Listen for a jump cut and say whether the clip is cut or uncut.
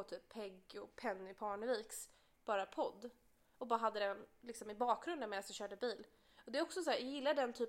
uncut